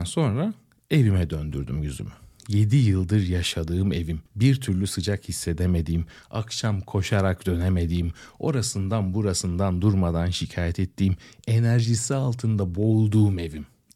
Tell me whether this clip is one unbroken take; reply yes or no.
yes